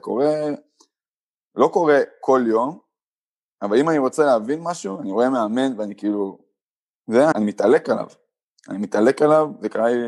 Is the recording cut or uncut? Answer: cut